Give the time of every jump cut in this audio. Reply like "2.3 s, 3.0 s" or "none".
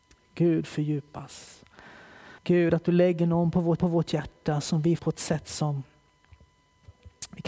2.4 s, 3.8 s, 5.0 s